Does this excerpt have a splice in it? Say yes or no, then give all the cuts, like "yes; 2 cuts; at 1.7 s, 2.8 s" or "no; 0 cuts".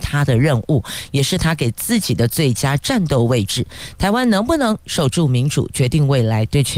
no; 0 cuts